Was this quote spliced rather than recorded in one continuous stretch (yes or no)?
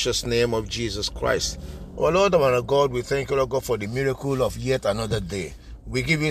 no